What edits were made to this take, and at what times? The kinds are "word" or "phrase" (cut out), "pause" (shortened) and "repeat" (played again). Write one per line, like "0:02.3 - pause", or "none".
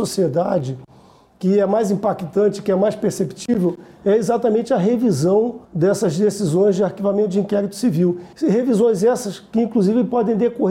0:05.6 - pause
0:08.3 - pause